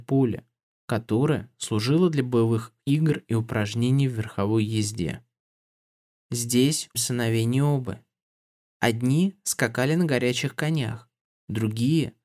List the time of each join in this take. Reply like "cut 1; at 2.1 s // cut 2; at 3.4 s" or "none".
cut 1; at 6.9 s